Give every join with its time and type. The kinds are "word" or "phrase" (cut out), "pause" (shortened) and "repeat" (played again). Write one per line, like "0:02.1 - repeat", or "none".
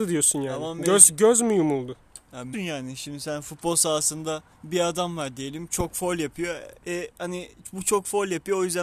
0:02.5 - word
0:04.5 - pause
0:06.8 - pause